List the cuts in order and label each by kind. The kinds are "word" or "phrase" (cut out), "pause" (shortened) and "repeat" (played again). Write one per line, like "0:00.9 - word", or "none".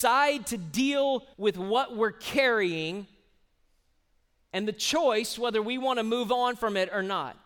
0:01.3 - pause